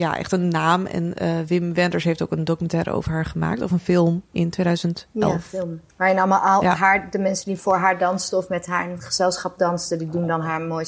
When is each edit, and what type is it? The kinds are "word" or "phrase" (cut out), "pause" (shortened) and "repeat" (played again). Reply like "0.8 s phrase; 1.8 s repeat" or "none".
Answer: 4.3 s pause; 5.9 s pause